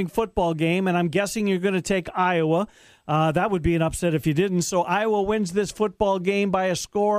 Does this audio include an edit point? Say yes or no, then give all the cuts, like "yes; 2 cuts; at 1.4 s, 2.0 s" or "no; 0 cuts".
no; 0 cuts